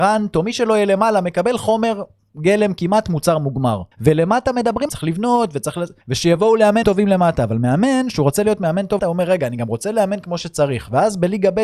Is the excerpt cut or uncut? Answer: cut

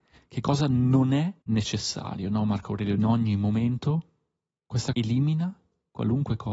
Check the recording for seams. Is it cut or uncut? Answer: cut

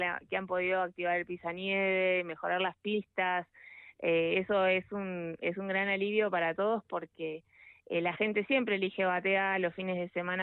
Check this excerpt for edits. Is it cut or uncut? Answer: uncut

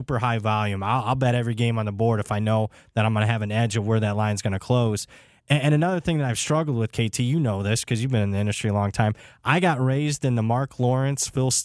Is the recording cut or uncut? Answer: uncut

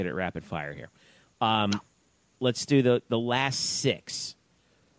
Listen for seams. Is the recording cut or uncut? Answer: uncut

